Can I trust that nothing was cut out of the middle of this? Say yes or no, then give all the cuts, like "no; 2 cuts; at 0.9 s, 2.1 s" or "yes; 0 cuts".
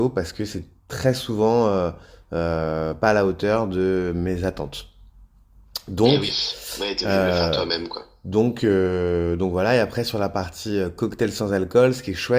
yes; 0 cuts